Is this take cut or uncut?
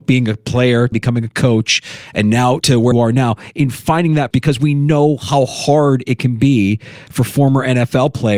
cut